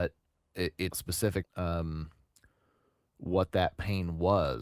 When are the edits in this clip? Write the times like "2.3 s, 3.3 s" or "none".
0.9 s, 1.4 s

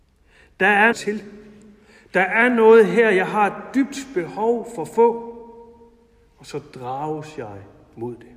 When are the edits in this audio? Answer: 0.9 s

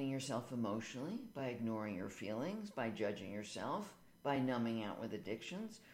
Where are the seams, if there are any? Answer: none

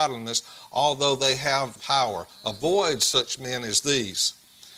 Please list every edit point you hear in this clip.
1.8 s

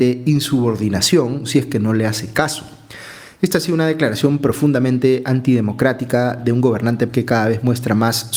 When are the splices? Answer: 7.1 s

